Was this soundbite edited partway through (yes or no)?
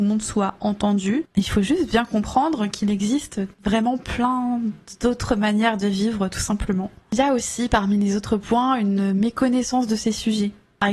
yes